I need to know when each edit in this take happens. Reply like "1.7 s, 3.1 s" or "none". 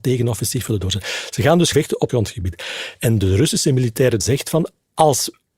1.7 s, 2.1 s, 4.2 s

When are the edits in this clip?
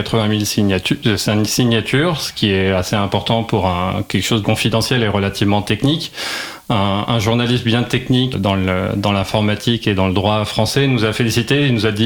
4.4 s, 8.3 s

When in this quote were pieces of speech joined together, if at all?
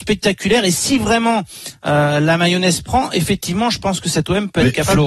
none

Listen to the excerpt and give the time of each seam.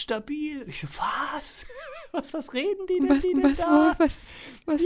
3.2 s

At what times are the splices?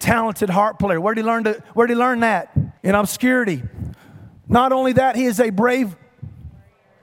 2.8 s, 4.4 s

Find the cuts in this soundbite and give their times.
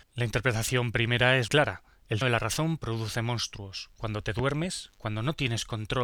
1.5 s, 2.2 s

